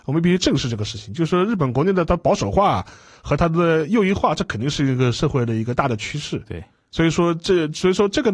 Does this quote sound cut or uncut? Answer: uncut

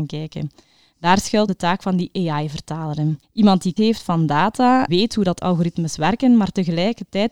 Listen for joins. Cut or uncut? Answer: cut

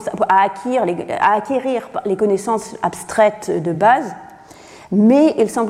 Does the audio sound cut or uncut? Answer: uncut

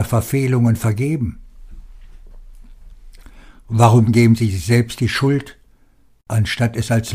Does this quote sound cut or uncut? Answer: uncut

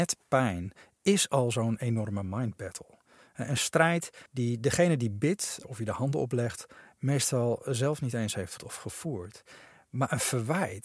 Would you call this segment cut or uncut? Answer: cut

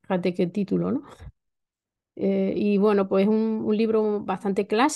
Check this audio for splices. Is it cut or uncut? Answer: uncut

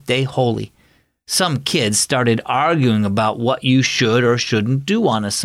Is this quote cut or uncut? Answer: uncut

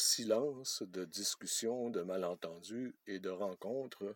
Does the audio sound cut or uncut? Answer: uncut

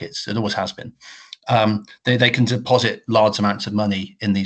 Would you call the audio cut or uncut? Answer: uncut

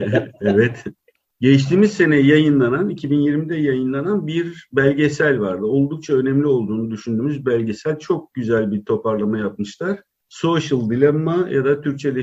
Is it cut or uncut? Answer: uncut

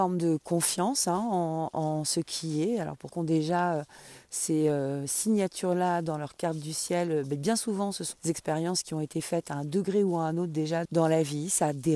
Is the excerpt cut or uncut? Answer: cut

